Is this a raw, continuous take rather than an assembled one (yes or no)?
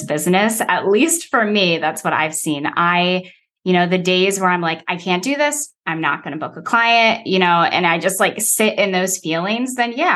yes